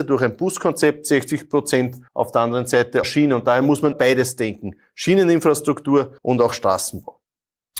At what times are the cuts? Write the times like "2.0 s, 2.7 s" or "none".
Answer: 2.1 s, 3.0 s, 3.9 s, 6.2 s